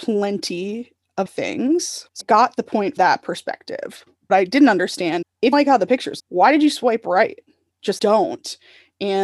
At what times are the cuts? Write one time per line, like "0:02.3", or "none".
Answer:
0:01.3
0:02.2
0:03.0
0:04.3
0:05.2
0:05.5
0:06.2
0:08.0